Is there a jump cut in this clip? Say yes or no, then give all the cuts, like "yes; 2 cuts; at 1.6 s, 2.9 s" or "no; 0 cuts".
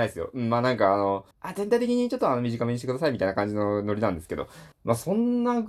yes; 2 cuts; at 1.3 s, 4.7 s